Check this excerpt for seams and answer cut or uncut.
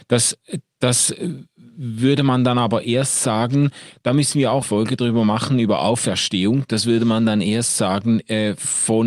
cut